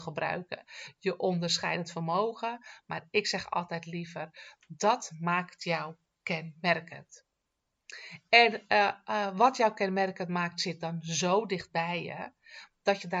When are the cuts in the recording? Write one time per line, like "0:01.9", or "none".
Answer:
none